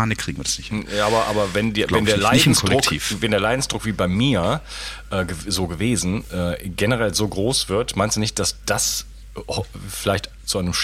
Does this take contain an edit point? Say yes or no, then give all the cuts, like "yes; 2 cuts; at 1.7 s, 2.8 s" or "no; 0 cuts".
no; 0 cuts